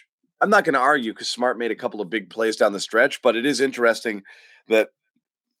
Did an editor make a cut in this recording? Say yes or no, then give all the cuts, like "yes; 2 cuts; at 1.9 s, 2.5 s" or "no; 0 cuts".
no; 0 cuts